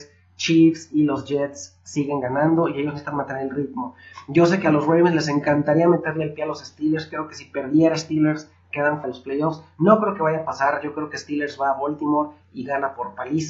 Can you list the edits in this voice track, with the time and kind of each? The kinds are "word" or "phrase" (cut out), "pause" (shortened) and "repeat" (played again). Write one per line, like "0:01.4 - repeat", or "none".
0:09.0 - word